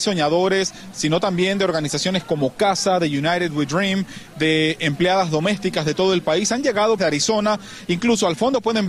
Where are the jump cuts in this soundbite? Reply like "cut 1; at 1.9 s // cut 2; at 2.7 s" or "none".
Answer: cut 1; at 7.0 s

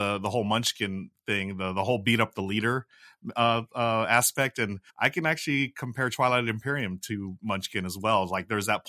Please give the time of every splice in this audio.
cut 1; at 4.9 s

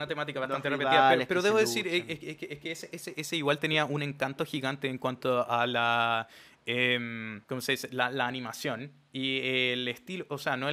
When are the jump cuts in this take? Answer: cut 1; at 7.4 s

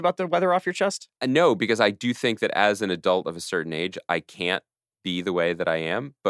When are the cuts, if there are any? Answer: cut 1; at 1.2 s // cut 2; at 4.9 s

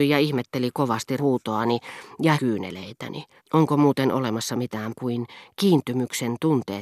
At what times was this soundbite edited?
cut 1; at 1.2 s // cut 2; at 2.3 s // cut 3; at 3.4 s // cut 4; at 4.9 s

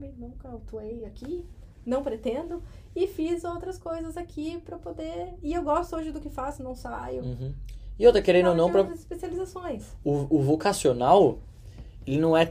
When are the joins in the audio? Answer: none

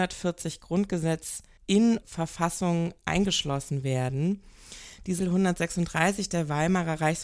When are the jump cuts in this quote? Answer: cut 1; at 2.0 s // cut 2; at 5.2 s

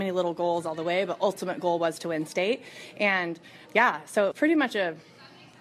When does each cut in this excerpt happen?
cut 1; at 3.7 s // cut 2; at 4.3 s

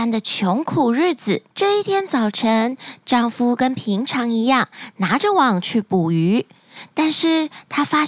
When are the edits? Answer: cut 1; at 1.5 s

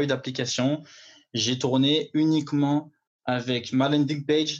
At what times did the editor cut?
none

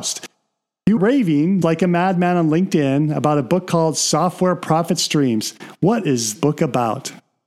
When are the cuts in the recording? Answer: cut 1; at 1.0 s // cut 2; at 1.6 s // cut 3; at 6.4 s

